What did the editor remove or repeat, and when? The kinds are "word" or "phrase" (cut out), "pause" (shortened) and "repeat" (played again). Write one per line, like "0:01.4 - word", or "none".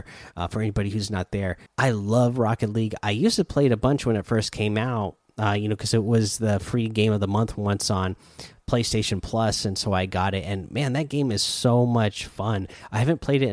0:01.7 - word